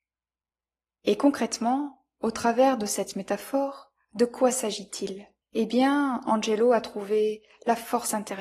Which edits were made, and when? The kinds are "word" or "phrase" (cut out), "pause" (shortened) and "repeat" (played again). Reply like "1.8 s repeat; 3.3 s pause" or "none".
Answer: 5.4 s pause